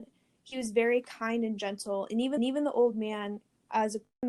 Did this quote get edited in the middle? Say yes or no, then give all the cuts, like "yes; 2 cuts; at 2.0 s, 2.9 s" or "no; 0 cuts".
yes; 1 cut; at 2.4 s